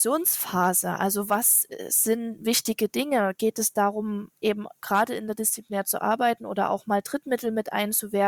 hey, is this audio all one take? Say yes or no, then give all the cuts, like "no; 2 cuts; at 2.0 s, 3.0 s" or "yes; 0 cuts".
yes; 0 cuts